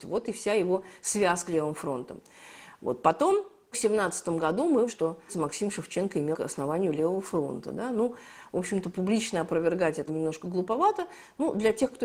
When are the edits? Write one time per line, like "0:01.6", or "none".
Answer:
0:01.5
0:03.7
0:04.9
0:05.3
0:06.3
0:10.1

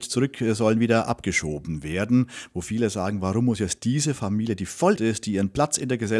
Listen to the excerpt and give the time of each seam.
0:05.0

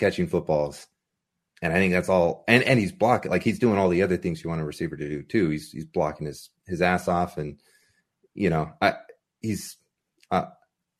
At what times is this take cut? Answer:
none

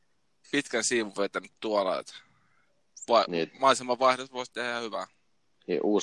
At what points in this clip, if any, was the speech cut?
none

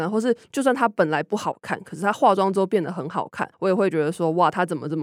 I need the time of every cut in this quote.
0:03.5

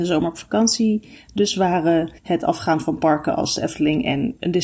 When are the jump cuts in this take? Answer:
0:02.2

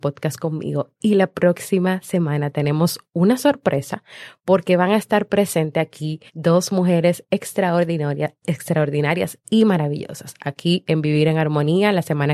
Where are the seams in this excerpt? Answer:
0:06.3

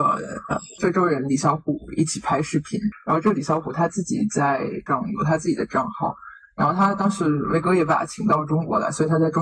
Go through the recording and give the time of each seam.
0:04.9

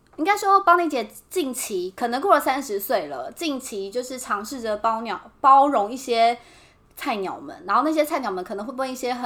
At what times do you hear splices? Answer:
none

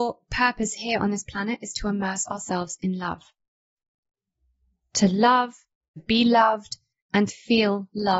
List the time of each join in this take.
0:06.0
0:07.3

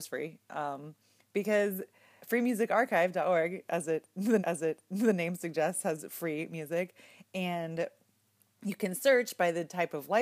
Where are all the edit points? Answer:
0:02.2
0:04.4

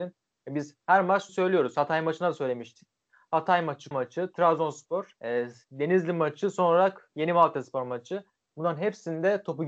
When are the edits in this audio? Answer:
0:01.3
0:03.9
0:05.2

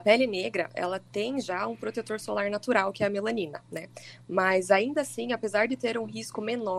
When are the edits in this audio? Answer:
none

